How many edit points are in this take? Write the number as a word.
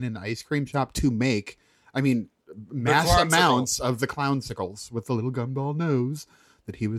zero